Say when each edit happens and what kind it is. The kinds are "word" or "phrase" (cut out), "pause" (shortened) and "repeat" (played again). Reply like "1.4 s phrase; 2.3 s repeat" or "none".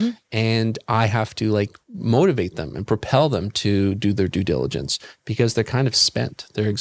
1.8 s pause